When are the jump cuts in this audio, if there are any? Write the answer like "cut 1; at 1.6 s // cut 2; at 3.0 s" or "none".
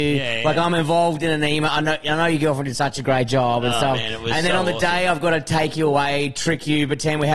none